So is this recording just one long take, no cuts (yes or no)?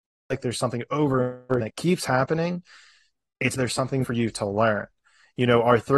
no